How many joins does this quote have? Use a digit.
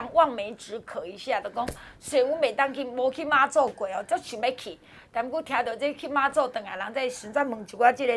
0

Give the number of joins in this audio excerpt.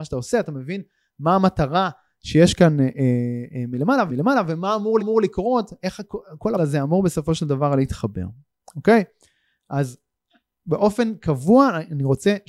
3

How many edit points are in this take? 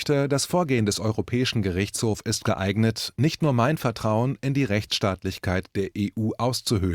0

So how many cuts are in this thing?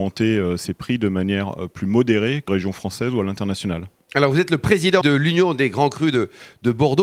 2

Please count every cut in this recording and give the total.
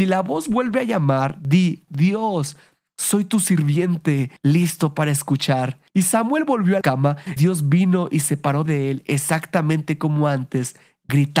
6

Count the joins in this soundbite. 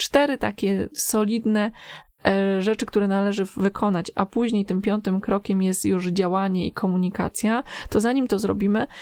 0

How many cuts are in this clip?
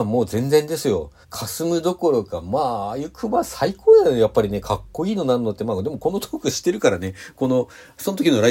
1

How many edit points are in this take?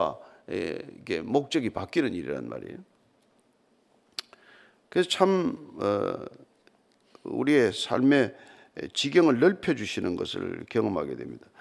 0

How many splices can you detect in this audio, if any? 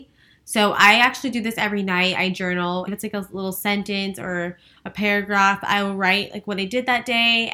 1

